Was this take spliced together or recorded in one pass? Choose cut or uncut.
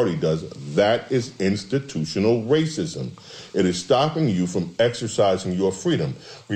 uncut